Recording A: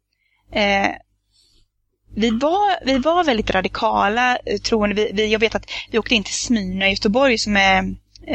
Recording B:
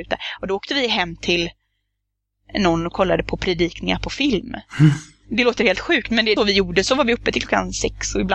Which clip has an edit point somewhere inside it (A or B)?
B